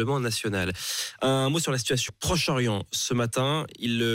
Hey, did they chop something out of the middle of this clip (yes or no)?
yes